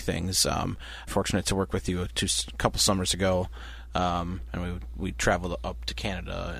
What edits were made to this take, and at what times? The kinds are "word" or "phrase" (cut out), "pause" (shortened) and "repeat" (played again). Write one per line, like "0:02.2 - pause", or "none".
0:01.1 - phrase